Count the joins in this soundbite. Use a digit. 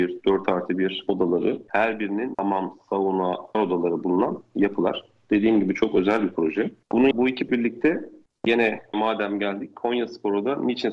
6